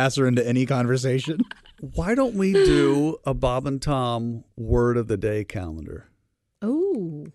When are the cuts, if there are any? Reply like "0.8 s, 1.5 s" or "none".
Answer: none